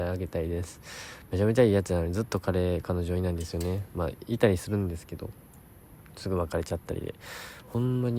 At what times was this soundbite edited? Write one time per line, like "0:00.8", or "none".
none